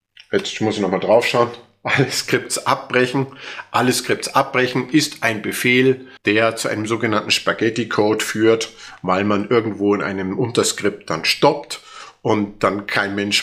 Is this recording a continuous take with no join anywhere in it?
no; 1 cut; at 6.2 s

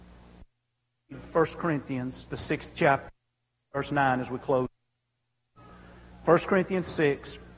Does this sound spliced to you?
no; 0 cuts

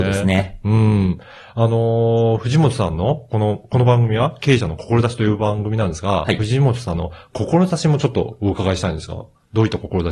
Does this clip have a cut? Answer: no; 0 cuts

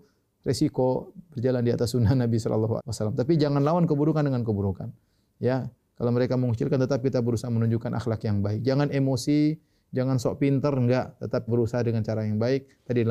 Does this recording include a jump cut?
yes; 2 cuts; at 2.8 s, 11.5 s

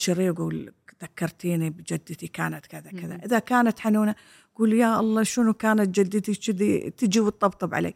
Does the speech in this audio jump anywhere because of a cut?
no; 0 cuts

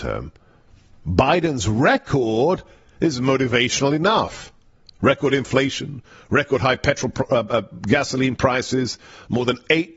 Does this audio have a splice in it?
no; 0 cuts

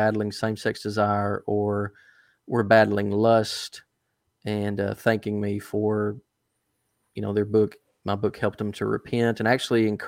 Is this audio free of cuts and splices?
yes; 0 cuts

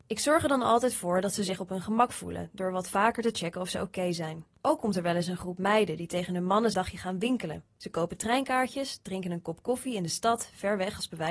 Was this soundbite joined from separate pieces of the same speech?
yes; 1 cut; at 6.7 s

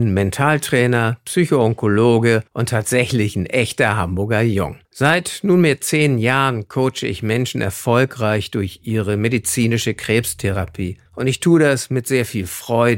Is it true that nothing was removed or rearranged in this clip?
no; 3 cuts; at 2.5 s, 4.8 s, 11.1 s

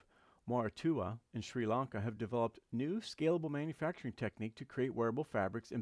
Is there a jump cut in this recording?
no; 0 cuts

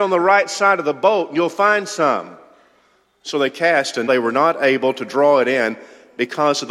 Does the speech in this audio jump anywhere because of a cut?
yes; 1 cut; at 4.1 s

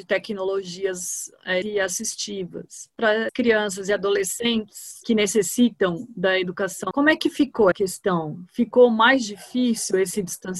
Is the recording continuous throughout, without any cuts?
no; 4 cuts; at 1.6 s, 3.3 s, 6.9 s, 7.7 s

